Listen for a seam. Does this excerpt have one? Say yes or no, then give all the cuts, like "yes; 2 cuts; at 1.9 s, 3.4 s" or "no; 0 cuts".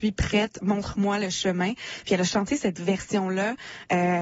no; 0 cuts